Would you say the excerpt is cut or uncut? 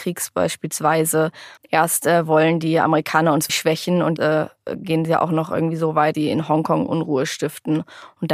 cut